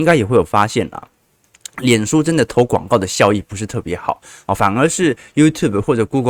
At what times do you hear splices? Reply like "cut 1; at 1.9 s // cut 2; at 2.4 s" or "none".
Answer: none